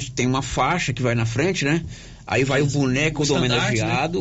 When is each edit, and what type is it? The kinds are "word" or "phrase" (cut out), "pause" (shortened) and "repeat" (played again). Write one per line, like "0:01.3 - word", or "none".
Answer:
none